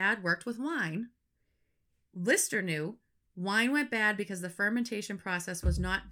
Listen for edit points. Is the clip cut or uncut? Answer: uncut